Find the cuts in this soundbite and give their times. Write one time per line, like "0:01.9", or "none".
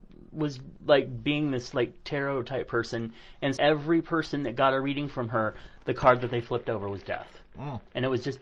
0:03.6